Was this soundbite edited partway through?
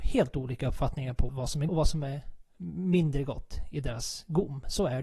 yes; 2 cuts; at 1.3 s, 1.7 s

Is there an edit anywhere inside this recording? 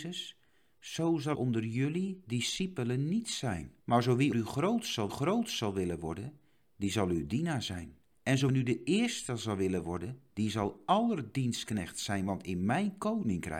yes; 6 cuts; at 1.3 s, 3.8 s, 4.3 s, 5.1 s, 8.1 s, 8.5 s

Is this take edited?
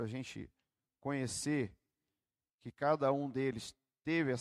no; 0 cuts

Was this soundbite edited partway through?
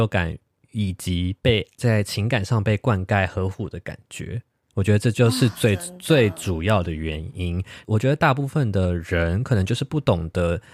no; 0 cuts

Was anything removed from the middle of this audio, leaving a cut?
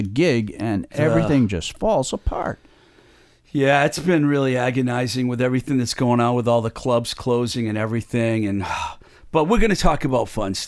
no; 0 cuts

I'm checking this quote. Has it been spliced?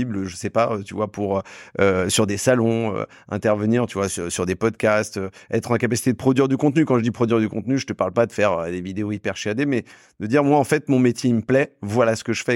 no; 0 cuts

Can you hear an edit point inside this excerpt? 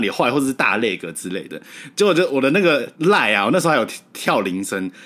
yes; 1 cut; at 2.9 s

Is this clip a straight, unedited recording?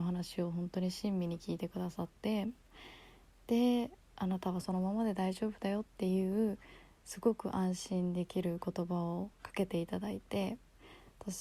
no; 2 cuts; at 5.9 s, 9.3 s

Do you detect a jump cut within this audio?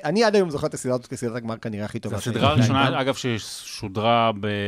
no; 0 cuts

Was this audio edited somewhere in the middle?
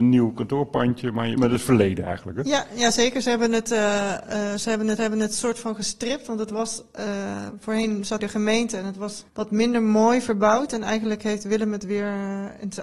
yes; 4 cuts; at 1.4 s, 5.0 s, 8.2 s, 9.3 s

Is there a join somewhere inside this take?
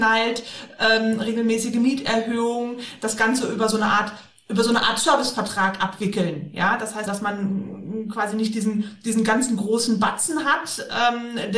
yes; 1 cut; at 7.1 s

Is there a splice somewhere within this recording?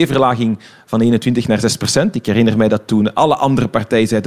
no; 0 cuts

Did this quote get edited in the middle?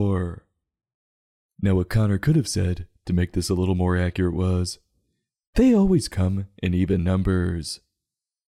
no; 0 cuts

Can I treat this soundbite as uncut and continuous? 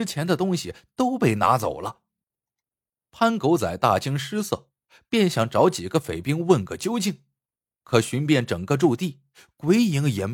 yes; 0 cuts

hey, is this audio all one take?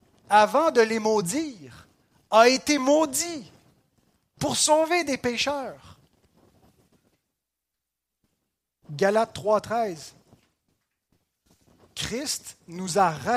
yes; 0 cuts

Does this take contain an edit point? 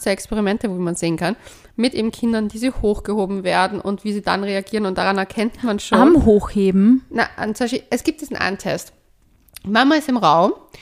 no; 0 cuts

